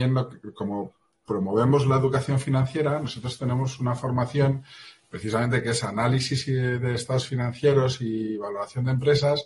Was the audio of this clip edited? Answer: no; 0 cuts

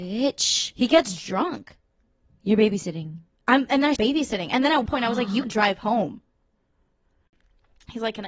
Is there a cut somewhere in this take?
yes; 3 cuts; at 4.0 s, 4.9 s, 5.4 s

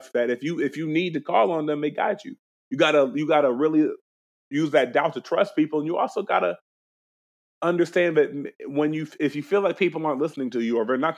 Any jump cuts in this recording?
no; 0 cuts

